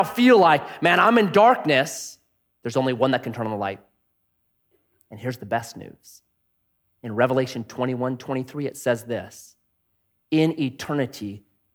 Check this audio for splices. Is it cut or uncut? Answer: uncut